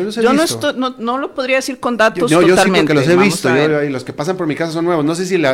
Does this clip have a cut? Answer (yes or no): no